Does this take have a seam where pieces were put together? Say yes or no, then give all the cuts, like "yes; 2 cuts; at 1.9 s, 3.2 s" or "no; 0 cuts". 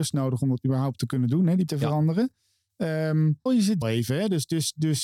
yes; 3 cuts; at 1.7 s, 3.5 s, 3.8 s